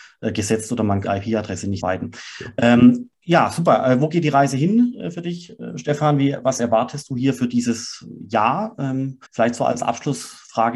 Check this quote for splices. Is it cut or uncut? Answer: cut